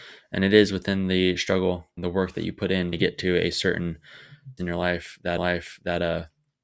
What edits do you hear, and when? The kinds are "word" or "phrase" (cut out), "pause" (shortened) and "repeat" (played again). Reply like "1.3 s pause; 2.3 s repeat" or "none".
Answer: 2.0 s word; 2.9 s word; 4.6 s phrase; 5.4 s repeat